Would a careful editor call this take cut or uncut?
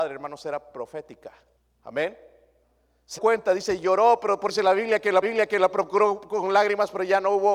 cut